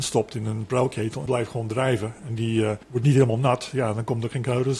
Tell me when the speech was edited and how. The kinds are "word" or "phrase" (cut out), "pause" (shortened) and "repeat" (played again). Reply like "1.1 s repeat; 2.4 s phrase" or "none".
1.3 s word; 2.8 s pause